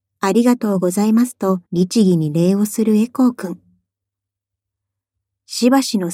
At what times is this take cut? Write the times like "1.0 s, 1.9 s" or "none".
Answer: 1.7 s